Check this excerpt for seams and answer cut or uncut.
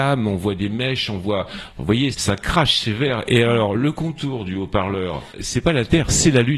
cut